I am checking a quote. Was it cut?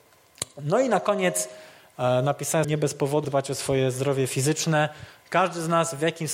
yes; 2 cuts; at 2.6 s, 3.2 s

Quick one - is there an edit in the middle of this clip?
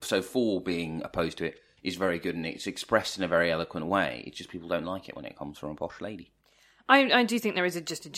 no; 0 cuts

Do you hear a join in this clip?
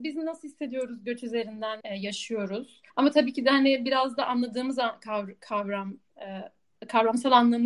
yes; 2 cuts; at 1.8 s, 2.9 s

